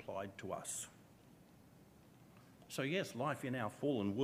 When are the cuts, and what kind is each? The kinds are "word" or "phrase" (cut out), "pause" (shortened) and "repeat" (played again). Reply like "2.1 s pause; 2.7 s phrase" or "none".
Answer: none

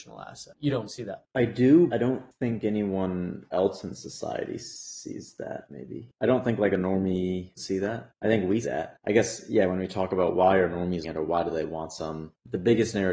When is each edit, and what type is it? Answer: 1.9 s phrase; 7.6 s word; 8.6 s word; 11.0 s word

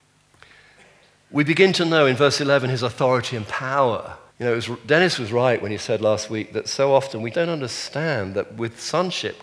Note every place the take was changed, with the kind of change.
4.3 s pause; 7.3 s word

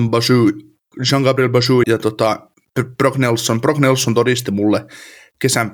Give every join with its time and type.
1.8 s word

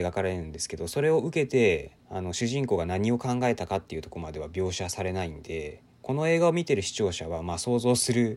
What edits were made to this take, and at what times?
2.0 s pause; 5.9 s pause

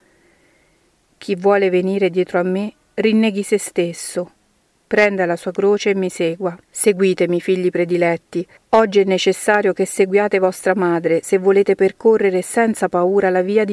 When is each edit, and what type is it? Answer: 6.6 s pause; 8.6 s pause

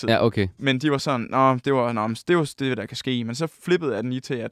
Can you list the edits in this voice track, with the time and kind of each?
none

